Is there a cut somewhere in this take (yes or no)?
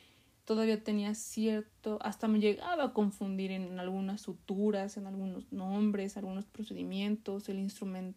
no